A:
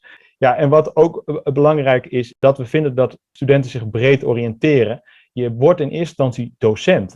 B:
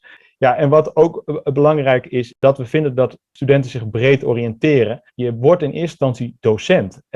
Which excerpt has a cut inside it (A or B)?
B